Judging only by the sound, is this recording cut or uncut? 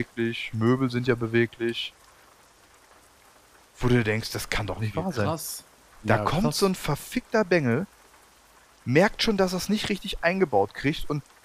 uncut